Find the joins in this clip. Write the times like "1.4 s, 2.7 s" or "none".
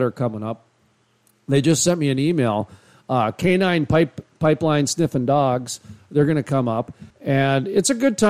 7.1 s